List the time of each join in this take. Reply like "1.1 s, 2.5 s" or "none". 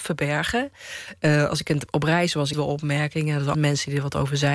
2.5 s, 3.5 s